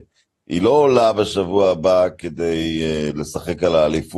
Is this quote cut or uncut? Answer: uncut